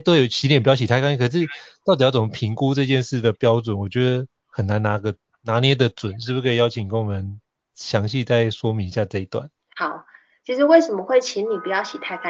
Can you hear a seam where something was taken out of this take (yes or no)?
yes